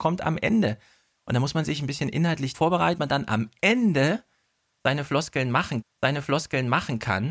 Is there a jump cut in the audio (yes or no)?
yes